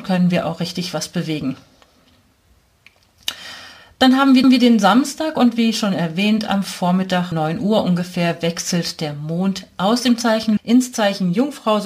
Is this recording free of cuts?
no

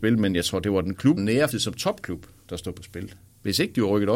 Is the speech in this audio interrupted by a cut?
yes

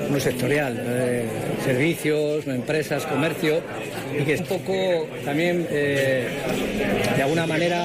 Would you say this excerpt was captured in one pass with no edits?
no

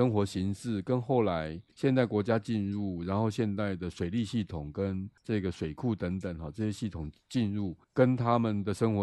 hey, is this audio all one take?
no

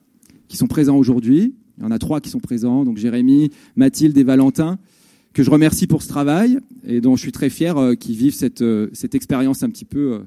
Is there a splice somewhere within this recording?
no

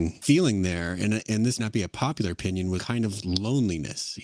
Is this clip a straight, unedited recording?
no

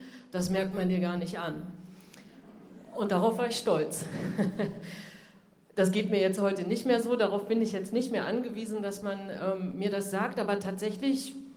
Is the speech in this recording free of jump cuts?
yes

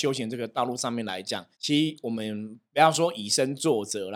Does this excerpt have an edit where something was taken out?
yes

